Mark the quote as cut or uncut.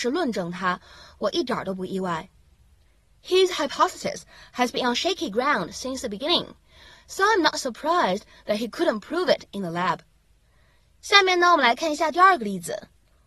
uncut